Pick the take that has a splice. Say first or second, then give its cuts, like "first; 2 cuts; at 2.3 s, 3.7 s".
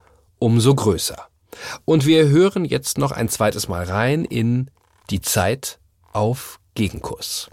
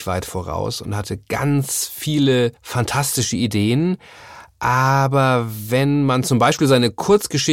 second; 1 cut; at 2.6 s